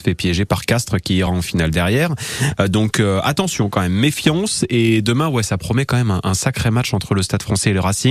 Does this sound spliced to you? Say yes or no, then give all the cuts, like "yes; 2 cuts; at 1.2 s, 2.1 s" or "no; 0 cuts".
no; 0 cuts